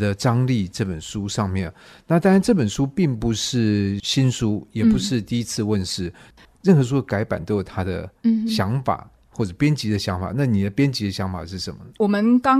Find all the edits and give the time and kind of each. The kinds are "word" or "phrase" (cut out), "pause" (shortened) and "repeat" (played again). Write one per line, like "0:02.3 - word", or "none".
none